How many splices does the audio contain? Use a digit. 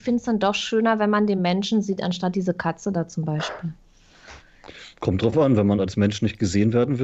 0